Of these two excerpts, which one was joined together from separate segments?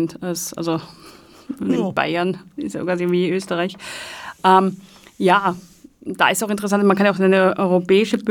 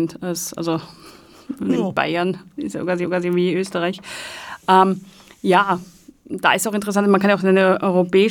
second; 1 cut; at 3.0 s

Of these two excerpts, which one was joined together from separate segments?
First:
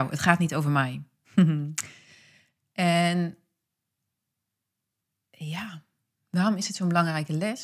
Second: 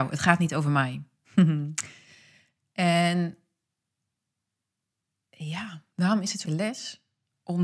second; 2 cuts; at 5.9 s, 6.4 s

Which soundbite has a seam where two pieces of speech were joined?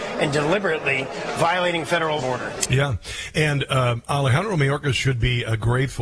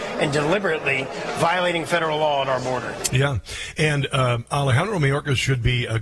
first; 1 cut; at 2.2 s

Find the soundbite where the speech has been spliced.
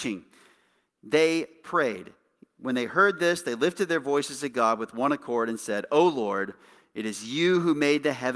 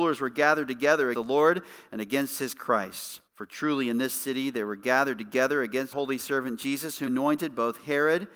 second; 4 cuts; at 1.1 s, 3.3 s, 5.9 s, 7.1 s

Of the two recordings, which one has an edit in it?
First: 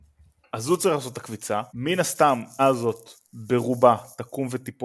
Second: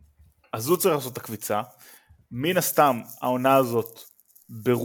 first; 3 cuts; at 1.7 s, 2.6 s, 3.2 s

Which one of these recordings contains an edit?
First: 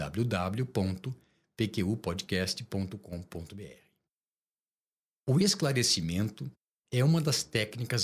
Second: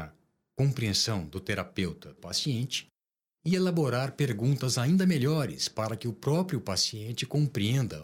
second; 1 cut; at 2.2 s

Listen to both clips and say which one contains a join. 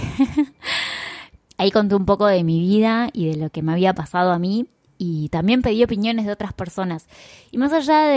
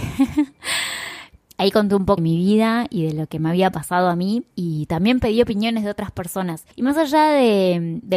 second; 3 cuts; at 2.2 s, 4.5 s, 6.7 s

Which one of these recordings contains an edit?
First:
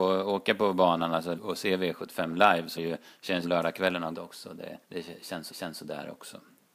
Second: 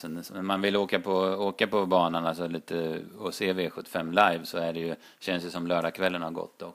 first; 6 cuts; at 1.3 s, 2.8 s, 3.4 s, 4.1 s, 4.8 s, 5.5 s

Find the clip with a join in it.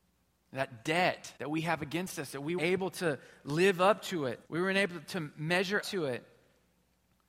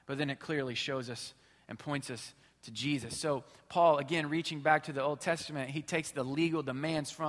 first; 4 cuts; at 1.4 s, 2.6 s, 4.4 s, 5.8 s

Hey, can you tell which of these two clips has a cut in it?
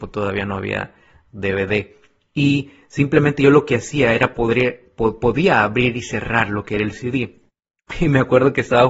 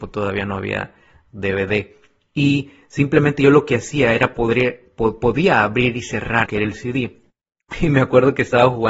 second; 1 cut; at 6.5 s

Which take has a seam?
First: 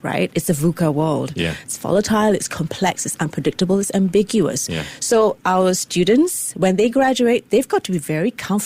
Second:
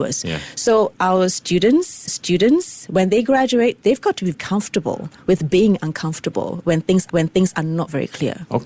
second; 3 cuts; at 2.1 s, 4.3 s, 7.1 s

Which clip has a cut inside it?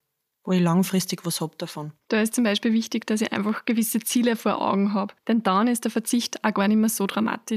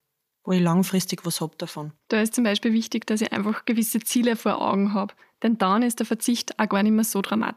first; 1 cut; at 5.2 s

